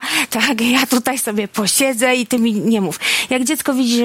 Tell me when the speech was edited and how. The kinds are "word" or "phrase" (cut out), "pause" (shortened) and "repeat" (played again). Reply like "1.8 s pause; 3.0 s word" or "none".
none